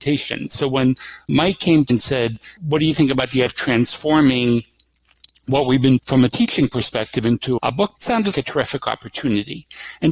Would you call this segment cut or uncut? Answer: cut